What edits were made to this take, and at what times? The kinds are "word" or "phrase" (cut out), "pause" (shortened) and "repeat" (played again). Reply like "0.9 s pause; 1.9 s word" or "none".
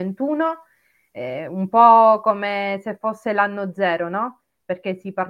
none